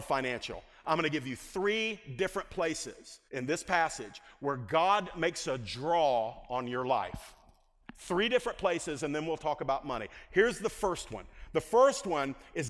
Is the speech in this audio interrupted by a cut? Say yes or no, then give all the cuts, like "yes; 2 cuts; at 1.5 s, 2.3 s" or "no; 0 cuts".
yes; 1 cut; at 3.3 s